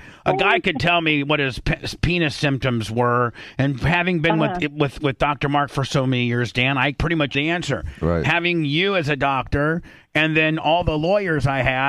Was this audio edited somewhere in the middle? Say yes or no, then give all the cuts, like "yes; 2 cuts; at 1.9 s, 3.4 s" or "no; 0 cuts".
yes; 2 cuts; at 7.0 s, 7.3 s